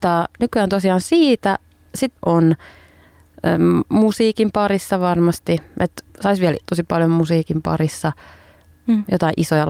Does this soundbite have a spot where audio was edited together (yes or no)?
yes